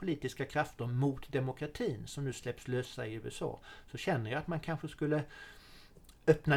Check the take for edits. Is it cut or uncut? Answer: uncut